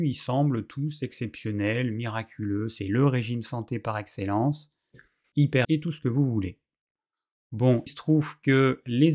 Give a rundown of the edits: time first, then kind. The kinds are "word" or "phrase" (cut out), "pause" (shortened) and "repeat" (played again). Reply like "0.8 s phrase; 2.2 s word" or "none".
5.6 s word; 7.9 s word